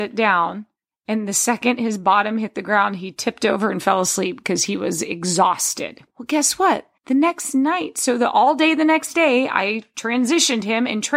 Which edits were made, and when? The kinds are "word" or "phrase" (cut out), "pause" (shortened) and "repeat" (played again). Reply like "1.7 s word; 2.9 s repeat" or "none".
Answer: 6.1 s pause; 7.0 s pause